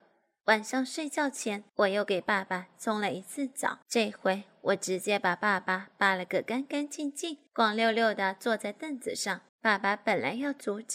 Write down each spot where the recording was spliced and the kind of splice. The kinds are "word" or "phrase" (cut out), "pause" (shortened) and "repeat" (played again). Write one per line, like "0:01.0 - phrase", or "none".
0:01.7 - pause
0:03.8 - pause
0:07.5 - pause
0:09.5 - pause